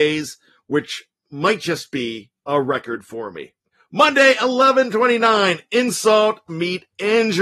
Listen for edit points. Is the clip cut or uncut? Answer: cut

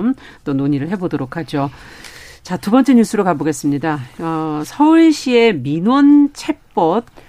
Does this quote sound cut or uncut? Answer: uncut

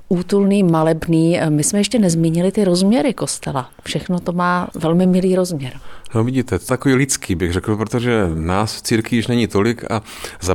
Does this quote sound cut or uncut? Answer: cut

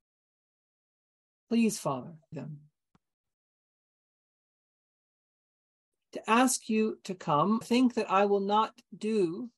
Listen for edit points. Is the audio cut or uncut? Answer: cut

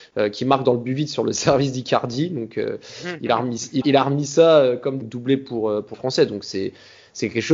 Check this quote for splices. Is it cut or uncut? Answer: cut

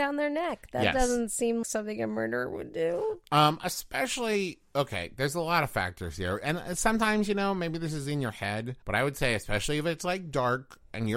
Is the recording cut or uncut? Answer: cut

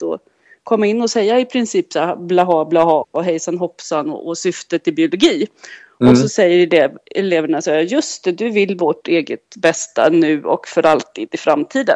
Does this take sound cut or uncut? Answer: uncut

